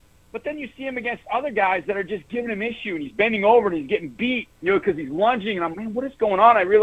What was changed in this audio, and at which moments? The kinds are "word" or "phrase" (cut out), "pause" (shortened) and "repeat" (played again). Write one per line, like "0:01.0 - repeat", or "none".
0:04.5 - pause
0:05.7 - word